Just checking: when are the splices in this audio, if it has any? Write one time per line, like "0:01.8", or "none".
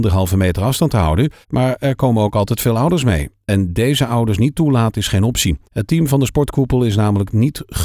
0:01.4
0:05.6